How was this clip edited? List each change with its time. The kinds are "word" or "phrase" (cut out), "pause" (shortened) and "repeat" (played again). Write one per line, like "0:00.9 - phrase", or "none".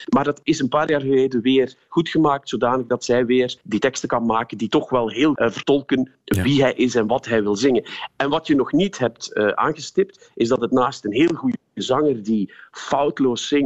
0:03.6 - pause
0:05.4 - word
0:11.7 - pause

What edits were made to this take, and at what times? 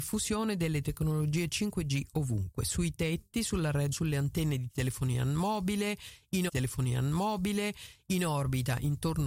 0:03.9 - word
0:06.5 - repeat

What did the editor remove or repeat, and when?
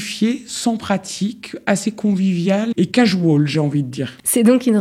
0:02.7 - word

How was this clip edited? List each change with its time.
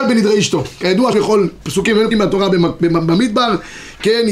0:01.1 - word
0:02.1 - phrase

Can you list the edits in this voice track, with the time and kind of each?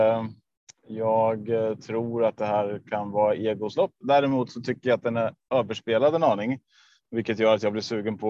none

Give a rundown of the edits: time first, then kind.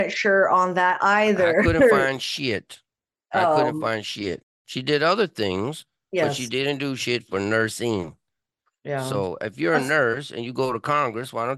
none

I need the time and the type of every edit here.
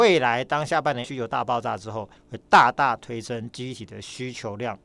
0:01.0 - word
0:02.2 - pause

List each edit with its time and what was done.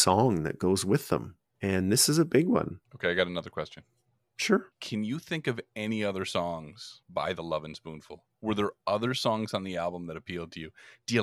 0:02.8 - pause
0:04.7 - pause
0:07.0 - pause

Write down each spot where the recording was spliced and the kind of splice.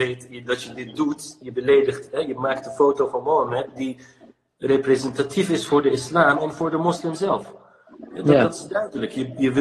none

